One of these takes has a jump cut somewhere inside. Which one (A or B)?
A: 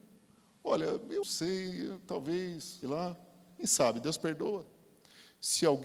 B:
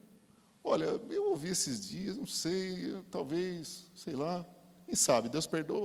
A